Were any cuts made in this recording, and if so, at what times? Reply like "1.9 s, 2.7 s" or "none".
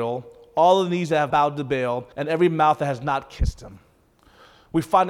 1.3 s, 2.1 s